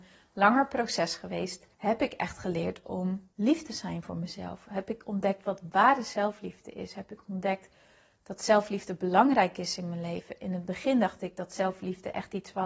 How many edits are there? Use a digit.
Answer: 2